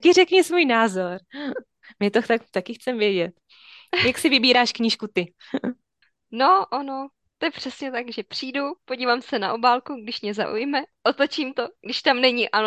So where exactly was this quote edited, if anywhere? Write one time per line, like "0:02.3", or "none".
none